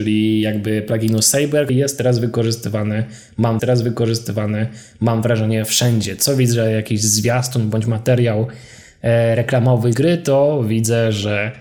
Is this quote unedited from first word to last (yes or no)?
no